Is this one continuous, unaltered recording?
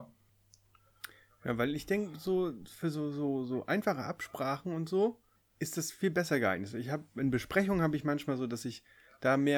yes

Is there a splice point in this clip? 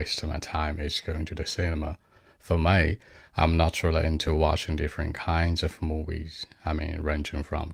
no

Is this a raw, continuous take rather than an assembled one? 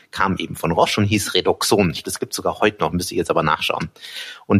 no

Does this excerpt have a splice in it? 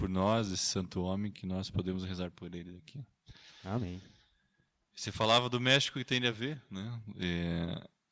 no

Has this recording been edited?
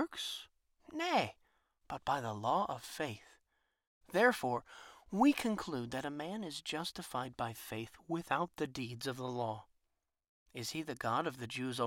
no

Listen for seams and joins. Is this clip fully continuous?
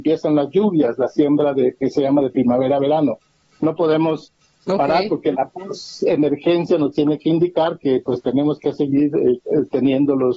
yes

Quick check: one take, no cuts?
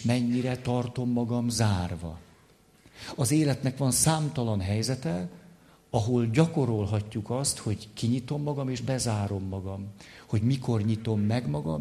yes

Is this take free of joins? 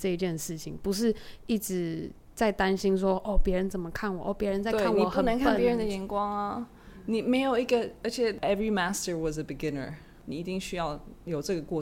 yes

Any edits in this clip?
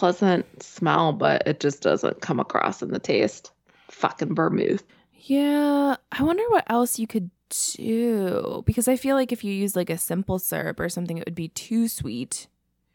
yes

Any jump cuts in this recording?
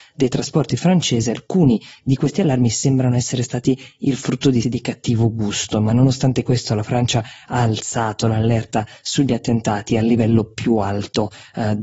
yes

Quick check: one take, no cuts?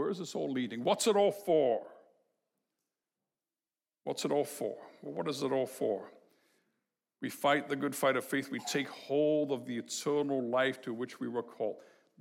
yes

